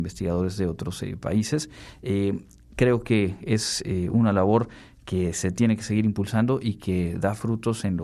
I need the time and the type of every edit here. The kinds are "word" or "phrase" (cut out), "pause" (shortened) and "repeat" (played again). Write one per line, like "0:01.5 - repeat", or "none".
none

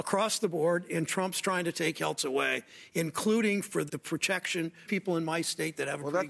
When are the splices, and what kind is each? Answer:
0:02.2 - word
0:03.9 - word
0:04.9 - phrase

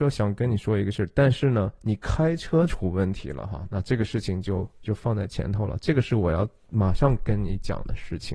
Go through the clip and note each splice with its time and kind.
0:04.8 - word

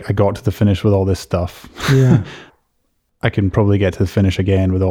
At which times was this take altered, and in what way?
0:02.5 - pause

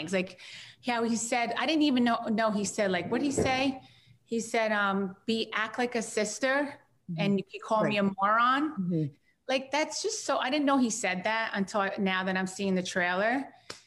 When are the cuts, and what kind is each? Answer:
none

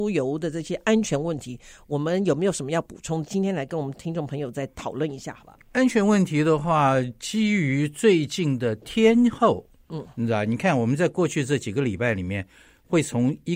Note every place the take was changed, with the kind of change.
0:05.6 - pause

